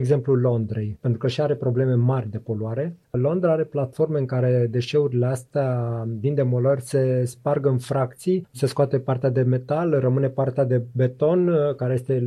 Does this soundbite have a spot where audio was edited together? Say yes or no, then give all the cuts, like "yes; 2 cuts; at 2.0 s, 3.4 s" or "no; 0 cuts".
no; 0 cuts